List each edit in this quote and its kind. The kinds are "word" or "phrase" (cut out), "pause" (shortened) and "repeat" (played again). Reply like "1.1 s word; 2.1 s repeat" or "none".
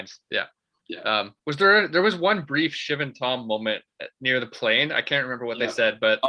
1.4 s pause